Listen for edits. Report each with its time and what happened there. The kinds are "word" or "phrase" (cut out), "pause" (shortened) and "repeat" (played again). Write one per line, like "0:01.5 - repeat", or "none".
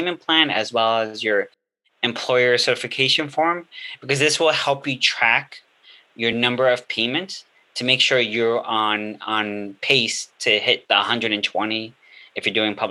none